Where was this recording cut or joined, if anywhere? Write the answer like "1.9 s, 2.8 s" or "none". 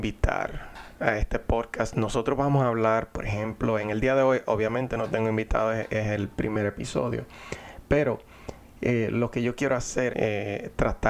10.1 s